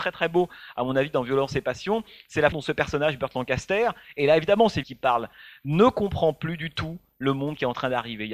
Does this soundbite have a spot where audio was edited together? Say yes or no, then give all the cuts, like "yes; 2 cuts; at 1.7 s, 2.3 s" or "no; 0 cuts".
yes; 2 cuts; at 2.5 s, 4.8 s